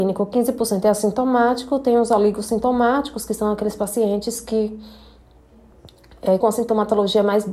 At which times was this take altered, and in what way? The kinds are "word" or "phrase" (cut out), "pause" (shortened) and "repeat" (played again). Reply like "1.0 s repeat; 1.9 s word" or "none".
6.4 s word